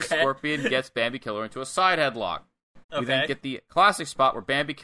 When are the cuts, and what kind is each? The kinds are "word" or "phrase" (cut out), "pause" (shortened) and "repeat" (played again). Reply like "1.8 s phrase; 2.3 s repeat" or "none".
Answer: 2.8 s pause